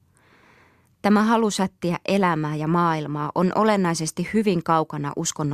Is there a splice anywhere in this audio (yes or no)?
no